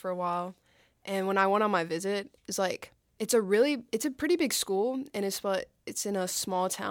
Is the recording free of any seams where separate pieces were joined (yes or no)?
no